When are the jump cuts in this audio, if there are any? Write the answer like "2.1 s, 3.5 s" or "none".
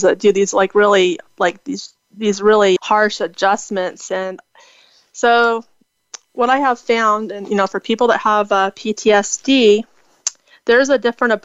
2.8 s